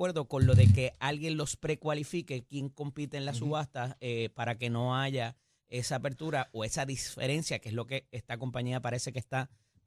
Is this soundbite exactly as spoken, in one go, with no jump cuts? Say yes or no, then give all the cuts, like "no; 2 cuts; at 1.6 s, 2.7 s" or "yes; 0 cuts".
yes; 0 cuts